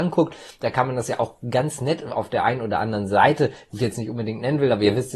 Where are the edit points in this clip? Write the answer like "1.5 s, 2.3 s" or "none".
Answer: none